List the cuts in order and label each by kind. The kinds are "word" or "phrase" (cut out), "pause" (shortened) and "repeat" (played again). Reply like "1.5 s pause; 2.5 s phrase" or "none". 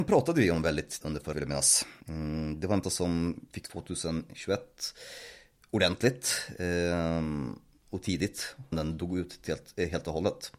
1.0 s word; 1.3 s word; 2.0 s pause; 2.8 s word; 3.6 s phrase; 8.7 s word